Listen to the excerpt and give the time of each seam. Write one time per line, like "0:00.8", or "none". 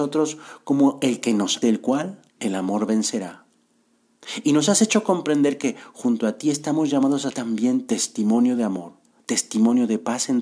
0:01.6
0:02.3
0:07.3